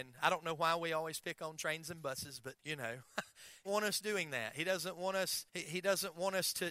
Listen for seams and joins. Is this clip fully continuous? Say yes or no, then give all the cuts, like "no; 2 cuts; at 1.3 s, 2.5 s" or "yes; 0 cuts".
no; 3 cuts; at 2.6 s, 3.6 s, 5.5 s